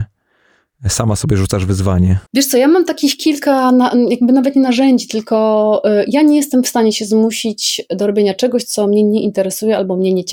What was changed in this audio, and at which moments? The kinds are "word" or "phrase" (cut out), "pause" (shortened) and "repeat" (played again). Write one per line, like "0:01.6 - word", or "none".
0:02.3 - pause